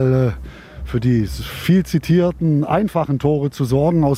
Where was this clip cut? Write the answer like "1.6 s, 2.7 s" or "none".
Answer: none

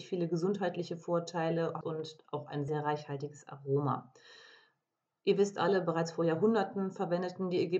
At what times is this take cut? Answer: 1.8 s, 2.7 s

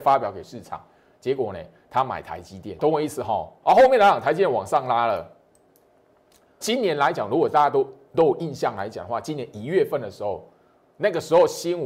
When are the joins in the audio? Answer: 2.8 s, 3.6 s, 6.6 s

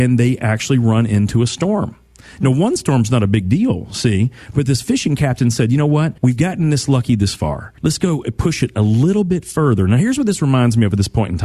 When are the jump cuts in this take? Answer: 6.2 s, 7.8 s

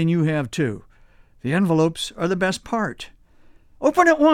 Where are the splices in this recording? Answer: none

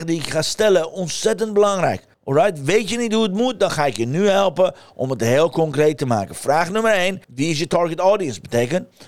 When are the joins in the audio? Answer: 2.1 s, 7.2 s

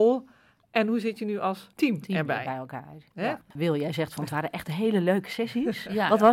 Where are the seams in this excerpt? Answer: 1.7 s

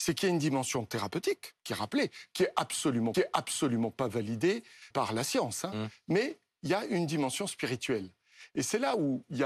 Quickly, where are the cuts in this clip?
1.6 s, 3.1 s, 4.9 s

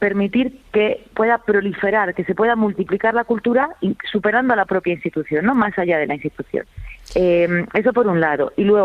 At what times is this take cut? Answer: none

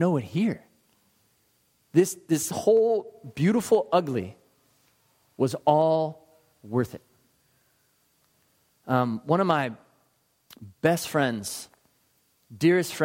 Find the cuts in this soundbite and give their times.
none

